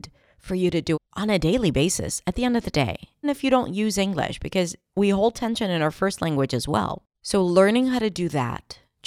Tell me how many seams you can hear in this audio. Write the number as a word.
four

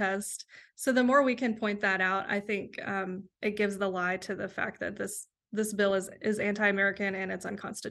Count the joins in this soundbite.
zero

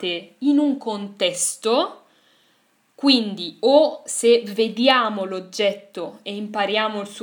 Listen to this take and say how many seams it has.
zero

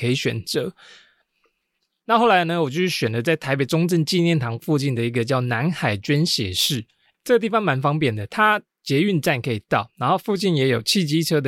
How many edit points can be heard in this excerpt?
one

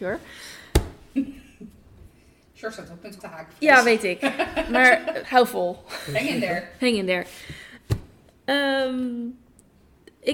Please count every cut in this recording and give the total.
two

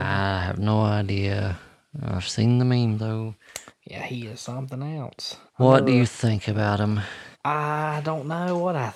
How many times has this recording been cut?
three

